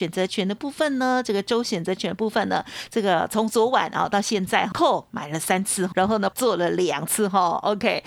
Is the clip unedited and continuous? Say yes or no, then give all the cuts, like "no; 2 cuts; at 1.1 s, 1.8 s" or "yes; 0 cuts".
no; 3 cuts; at 4.7 s, 5.9 s, 6.3 s